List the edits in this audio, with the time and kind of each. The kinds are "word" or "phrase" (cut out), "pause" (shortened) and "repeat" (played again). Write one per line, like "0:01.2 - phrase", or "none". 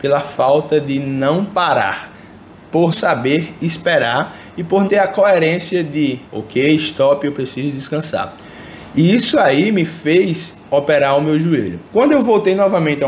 0:02.9 - word
0:04.9 - word
0:06.3 - pause
0:10.6 - pause
0:11.9 - pause